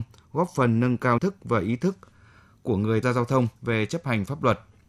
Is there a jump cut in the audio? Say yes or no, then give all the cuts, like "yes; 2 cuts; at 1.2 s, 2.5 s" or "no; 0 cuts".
yes; 3 cuts; at 1.2 s, 3.0 s, 3.6 s